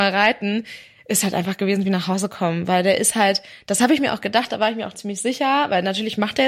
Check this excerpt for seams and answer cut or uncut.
uncut